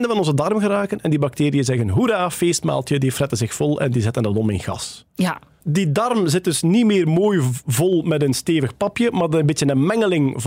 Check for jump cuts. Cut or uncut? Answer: uncut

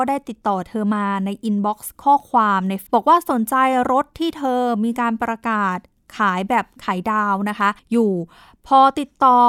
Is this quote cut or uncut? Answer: cut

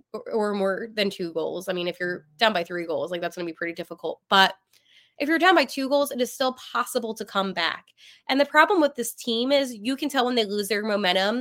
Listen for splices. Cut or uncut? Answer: uncut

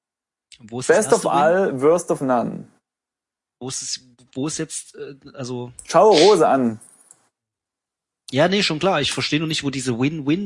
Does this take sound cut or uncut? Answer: uncut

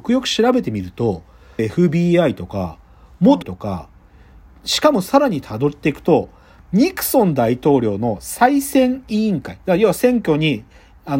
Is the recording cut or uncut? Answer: cut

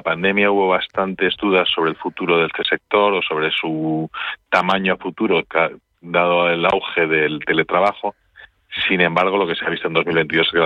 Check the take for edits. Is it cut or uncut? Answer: uncut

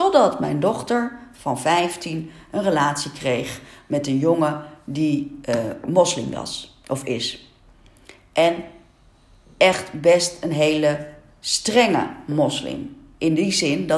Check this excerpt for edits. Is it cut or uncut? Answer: uncut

